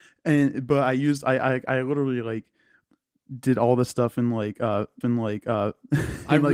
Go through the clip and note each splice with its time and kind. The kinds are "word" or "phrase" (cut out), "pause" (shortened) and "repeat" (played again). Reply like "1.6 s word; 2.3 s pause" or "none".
5.0 s repeat